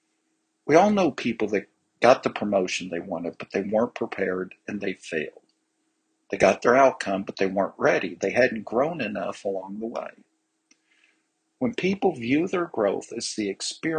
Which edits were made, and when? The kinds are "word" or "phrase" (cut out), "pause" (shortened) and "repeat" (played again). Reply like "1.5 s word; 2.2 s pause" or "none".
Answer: none

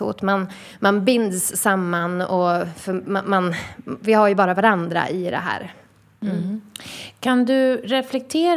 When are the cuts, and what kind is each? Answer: none

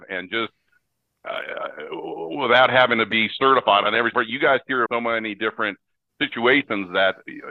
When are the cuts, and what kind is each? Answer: 4.1 s word; 4.9 s word

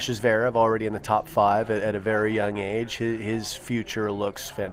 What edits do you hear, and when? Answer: none

